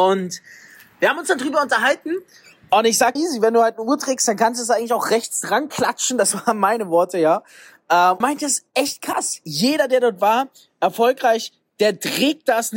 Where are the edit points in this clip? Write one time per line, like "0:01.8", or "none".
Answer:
0:03.2
0:08.2